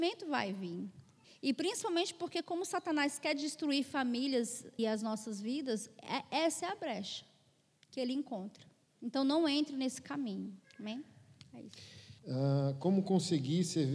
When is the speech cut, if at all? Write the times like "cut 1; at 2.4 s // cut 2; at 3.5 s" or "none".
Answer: cut 1; at 1.2 s // cut 2; at 4.8 s // cut 3; at 8.9 s // cut 4; at 10.6 s // cut 5; at 12.2 s